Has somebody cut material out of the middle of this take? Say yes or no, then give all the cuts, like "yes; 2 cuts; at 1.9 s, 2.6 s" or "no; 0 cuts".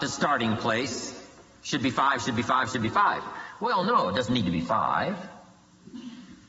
no; 0 cuts